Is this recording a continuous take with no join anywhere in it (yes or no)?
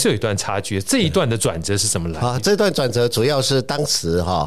yes